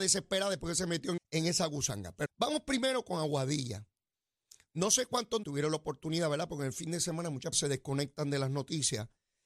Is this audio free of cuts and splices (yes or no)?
no